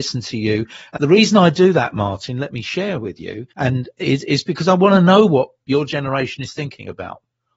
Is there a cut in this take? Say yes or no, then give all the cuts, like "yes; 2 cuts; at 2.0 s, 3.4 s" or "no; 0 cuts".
yes; 2 cuts; at 1.0 s, 3.5 s